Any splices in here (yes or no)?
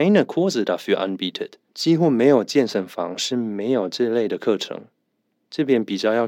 yes